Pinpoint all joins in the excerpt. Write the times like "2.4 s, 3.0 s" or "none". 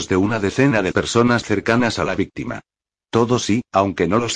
0.9 s, 1.4 s, 3.4 s